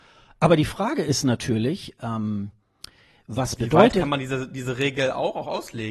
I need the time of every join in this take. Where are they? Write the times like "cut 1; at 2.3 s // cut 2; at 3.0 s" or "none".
none